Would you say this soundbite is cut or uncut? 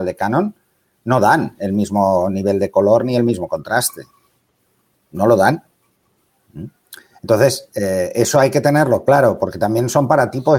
uncut